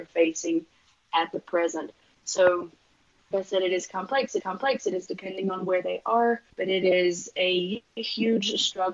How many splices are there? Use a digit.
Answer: 3